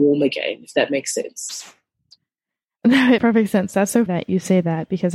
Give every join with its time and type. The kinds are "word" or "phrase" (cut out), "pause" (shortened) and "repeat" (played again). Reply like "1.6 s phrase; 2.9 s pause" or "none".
3.2 s word; 4.1 s word